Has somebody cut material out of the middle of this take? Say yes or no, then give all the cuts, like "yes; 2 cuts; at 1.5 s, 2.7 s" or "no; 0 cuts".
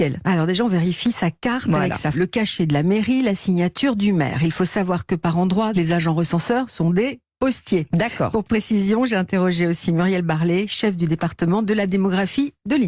yes; 3 cuts; at 2.1 s, 5.7 s, 8.4 s